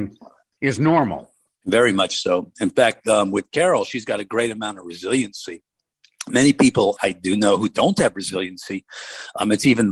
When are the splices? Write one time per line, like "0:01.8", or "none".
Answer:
0:07.0